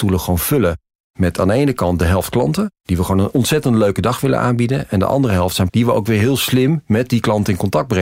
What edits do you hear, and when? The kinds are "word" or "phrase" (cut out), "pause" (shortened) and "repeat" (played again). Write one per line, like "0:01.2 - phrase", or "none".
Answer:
0:05.7 - word